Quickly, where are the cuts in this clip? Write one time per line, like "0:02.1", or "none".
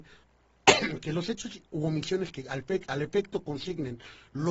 none

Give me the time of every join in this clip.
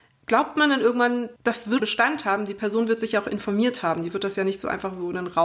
0:01.4
0:01.8

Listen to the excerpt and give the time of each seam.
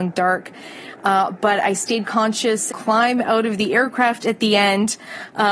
0:02.7

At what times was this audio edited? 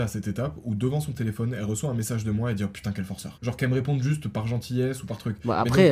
none

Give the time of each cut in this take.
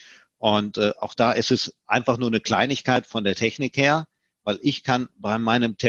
none

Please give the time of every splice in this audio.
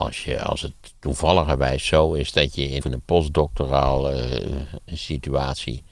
0:02.8

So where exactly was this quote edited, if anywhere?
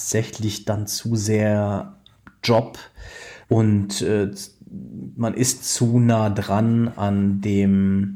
0:03.4

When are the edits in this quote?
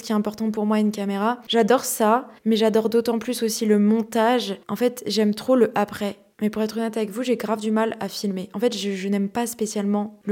0:02.4
0:04.6

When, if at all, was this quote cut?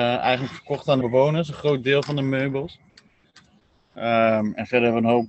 0:01.0

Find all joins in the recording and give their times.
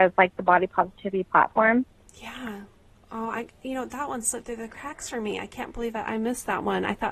0:02.9

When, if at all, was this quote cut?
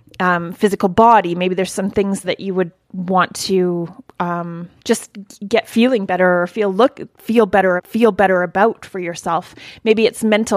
0:02.2
0:04.8
0:07.8

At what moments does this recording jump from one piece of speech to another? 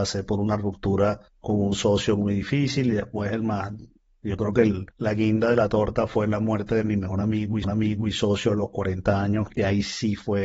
0:01.3
0:04.9
0:07.6

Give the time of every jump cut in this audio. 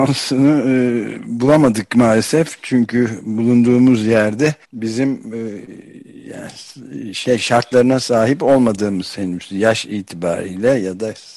0:04.6

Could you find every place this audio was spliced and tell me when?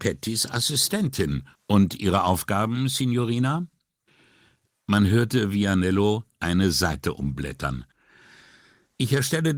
0:01.6

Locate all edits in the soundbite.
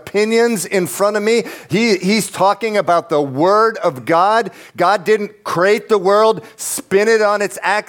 none

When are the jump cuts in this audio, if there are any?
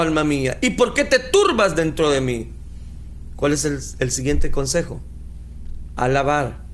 none

